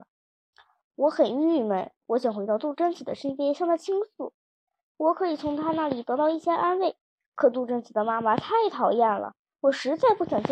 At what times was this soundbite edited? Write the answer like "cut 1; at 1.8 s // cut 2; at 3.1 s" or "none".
cut 1; at 2.0 s